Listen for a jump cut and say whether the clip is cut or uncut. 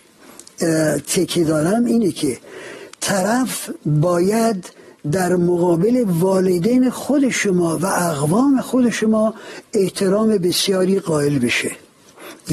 uncut